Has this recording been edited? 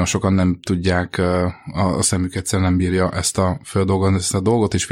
no; 0 cuts

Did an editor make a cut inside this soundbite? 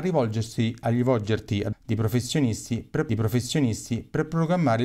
yes; 2 cuts; at 1.7 s, 3.1 s

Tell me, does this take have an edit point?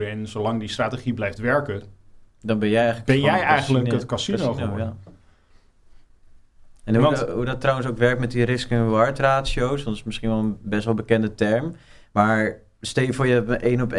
no; 0 cuts

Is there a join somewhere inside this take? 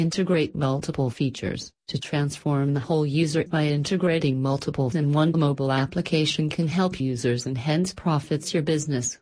yes; 5 cuts; at 1.8 s, 3.5 s, 4.9 s, 5.3 s, 7.0 s

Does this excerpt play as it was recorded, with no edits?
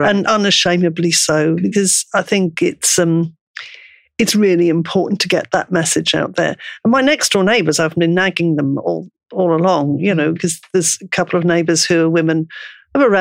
yes; 0 cuts

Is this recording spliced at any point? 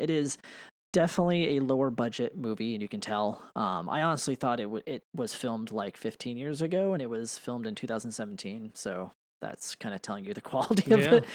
no; 0 cuts

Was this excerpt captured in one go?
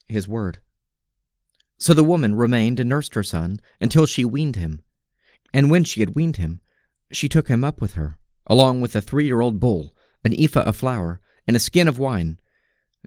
yes; 0 cuts

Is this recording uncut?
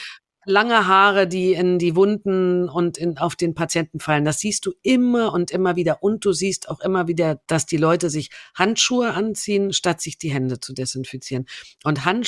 no; 1 cut; at 7.4 s

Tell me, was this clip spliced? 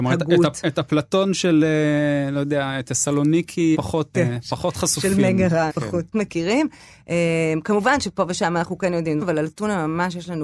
yes; 5 cuts; at 3.7 s, 4.1 s, 5.7 s, 6.1 s, 9.2 s

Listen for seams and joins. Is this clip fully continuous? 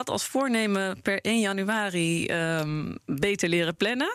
yes; 0 cuts

